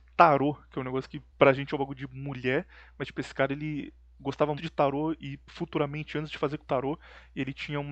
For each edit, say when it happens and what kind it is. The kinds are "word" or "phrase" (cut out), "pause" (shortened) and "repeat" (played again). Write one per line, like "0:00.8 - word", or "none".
0:01.3 - pause
0:04.6 - word
0:06.6 - phrase